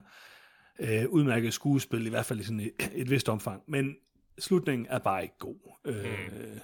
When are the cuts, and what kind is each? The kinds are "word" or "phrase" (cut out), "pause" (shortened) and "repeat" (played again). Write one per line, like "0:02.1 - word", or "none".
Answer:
none